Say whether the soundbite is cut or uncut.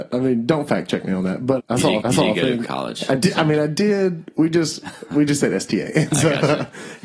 cut